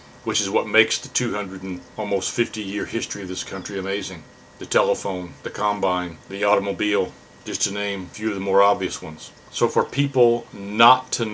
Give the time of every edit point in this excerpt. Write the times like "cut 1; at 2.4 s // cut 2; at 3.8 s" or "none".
cut 1; at 4.3 s // cut 2; at 5.4 s // cut 3; at 6.2 s // cut 4; at 7.3 s // cut 5; at 9.4 s